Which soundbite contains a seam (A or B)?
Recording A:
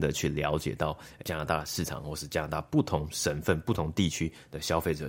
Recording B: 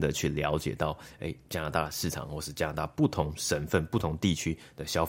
A